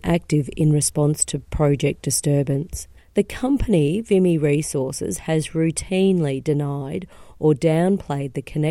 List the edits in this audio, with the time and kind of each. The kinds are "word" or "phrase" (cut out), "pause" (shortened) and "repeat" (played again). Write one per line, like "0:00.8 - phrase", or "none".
0:03.0 - pause